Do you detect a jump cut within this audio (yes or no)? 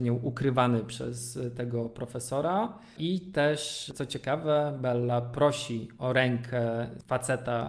no